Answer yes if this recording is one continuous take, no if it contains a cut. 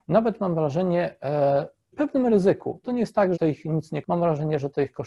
no